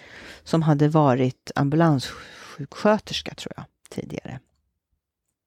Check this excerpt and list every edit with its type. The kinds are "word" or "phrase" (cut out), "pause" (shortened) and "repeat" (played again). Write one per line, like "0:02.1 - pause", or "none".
none